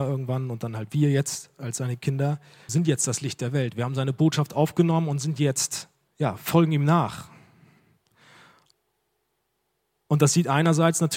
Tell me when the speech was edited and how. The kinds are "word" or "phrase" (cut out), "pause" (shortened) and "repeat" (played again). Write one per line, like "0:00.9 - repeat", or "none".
0:02.7 - word
0:06.1 - pause